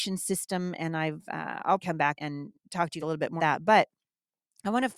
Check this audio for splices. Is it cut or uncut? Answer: cut